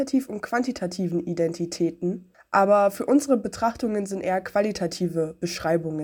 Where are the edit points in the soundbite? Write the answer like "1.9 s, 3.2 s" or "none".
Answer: none